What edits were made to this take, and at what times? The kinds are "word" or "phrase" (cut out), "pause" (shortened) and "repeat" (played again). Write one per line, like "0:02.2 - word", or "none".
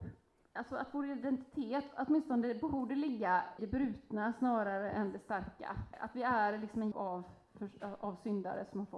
0:03.6 - word
0:06.1 - word
0:06.9 - word